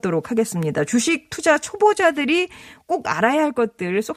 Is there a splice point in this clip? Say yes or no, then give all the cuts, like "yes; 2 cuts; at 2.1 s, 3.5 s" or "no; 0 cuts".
no; 0 cuts